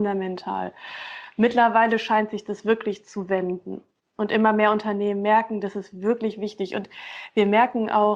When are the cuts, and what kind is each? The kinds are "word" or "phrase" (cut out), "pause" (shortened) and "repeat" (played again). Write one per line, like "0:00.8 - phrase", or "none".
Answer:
none